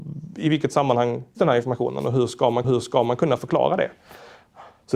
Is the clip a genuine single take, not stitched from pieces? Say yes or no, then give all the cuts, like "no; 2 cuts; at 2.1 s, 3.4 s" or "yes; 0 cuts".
no; 2 cuts; at 1.4 s, 2.6 s